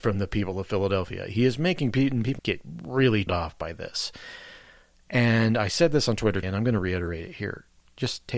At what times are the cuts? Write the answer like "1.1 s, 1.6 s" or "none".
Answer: 2.4 s, 3.3 s, 6.4 s